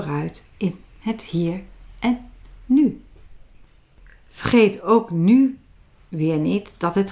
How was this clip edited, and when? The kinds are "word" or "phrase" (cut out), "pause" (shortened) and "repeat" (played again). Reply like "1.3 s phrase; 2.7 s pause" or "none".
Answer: none